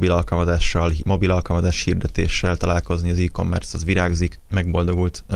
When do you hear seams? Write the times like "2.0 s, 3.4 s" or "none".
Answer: none